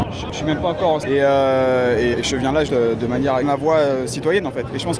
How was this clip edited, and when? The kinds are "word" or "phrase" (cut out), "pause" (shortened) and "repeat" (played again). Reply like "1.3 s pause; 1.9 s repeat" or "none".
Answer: 1.0 s word; 2.1 s word; 2.7 s word; 3.4 s word

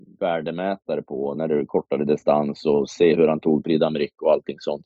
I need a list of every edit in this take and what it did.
none

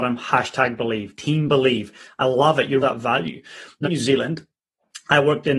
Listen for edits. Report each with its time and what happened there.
2.8 s word; 3.8 s word

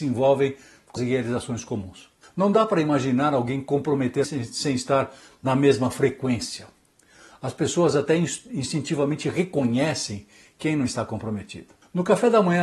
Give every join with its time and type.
1.0 s word; 4.2 s word

